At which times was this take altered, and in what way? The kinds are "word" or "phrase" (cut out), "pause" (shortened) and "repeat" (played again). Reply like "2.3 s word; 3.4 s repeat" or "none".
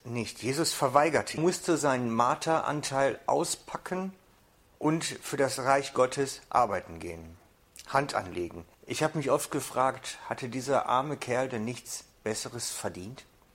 1.4 s phrase; 4.4 s pause; 8.7 s pause

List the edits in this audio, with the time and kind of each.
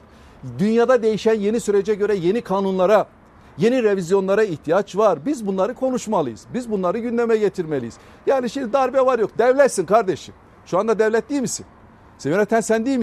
none

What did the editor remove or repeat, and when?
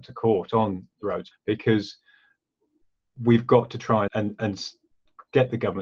1.3 s word; 4.1 s word

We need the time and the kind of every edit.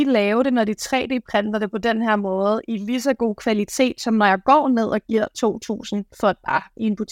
none

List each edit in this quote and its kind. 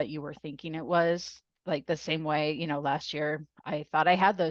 none

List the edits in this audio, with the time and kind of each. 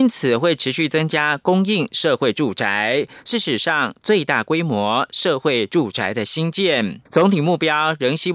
7.1 s pause

